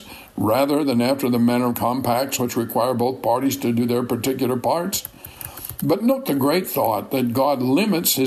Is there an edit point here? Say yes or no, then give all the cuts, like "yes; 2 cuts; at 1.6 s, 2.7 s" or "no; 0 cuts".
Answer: no; 0 cuts